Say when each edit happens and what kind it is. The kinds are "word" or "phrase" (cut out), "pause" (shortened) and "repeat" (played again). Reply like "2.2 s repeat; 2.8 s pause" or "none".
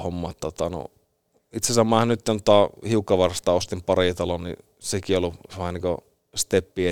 none